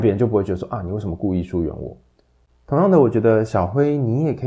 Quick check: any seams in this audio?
no; 0 cuts

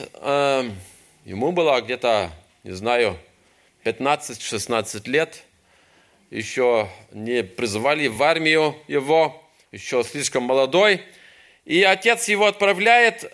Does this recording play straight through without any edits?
yes; 0 cuts

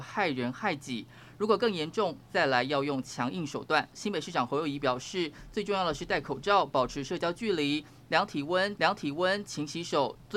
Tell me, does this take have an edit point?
yes; 1 cut; at 8.8 s

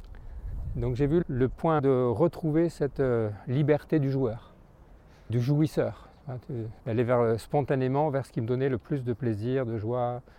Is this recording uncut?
no; 4 cuts; at 1.2 s, 1.8 s, 5.3 s, 6.8 s

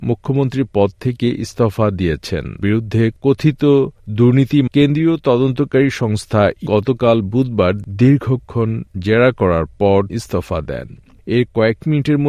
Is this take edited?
yes; 4 cuts; at 2.6 s, 4.7 s, 6.7 s, 10.1 s

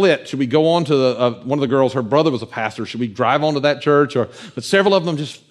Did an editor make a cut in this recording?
no; 0 cuts

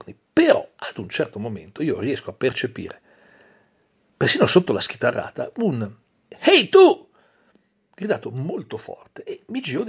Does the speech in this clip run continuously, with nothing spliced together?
no; 1 cut; at 6.0 s

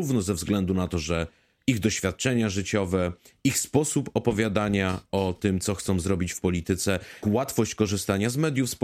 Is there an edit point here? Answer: yes; 1 cut; at 7.2 s

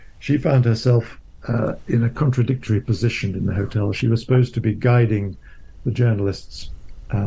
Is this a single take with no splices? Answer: yes; 0 cuts

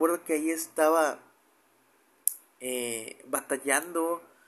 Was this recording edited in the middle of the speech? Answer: no; 0 cuts

